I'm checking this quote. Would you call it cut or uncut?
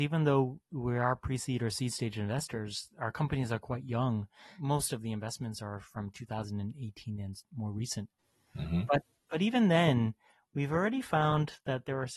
uncut